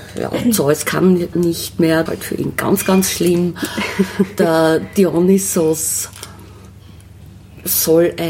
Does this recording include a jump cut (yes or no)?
yes